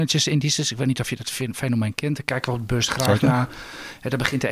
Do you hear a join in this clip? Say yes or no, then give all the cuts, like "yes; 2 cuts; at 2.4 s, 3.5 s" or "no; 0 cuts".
no; 0 cuts